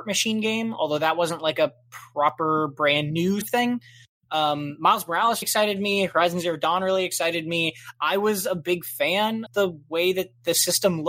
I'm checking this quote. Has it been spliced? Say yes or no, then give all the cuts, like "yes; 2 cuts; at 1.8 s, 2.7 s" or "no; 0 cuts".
yes; 3 cuts; at 3.4 s, 5.4 s, 9.5 s